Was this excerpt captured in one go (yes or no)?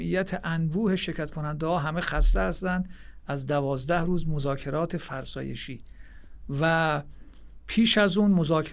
yes